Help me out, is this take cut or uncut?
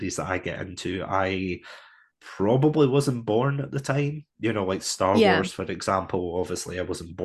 uncut